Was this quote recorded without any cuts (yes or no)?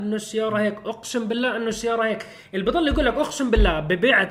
yes